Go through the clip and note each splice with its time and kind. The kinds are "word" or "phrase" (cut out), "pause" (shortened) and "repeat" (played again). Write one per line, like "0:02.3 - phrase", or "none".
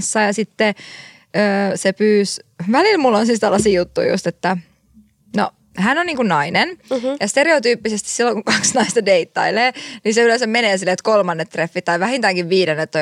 none